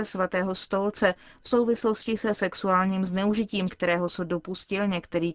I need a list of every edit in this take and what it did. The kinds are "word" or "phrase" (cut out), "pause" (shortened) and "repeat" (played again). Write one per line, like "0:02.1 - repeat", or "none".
none